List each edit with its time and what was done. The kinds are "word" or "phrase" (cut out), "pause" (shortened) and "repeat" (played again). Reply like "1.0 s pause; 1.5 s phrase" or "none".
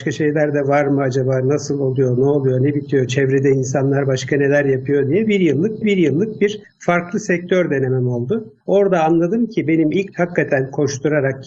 5.8 s repeat; 10.1 s phrase